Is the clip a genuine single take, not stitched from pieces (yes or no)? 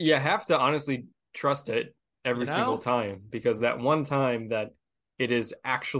yes